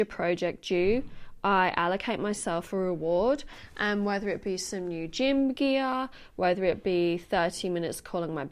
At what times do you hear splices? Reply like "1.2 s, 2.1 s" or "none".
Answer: none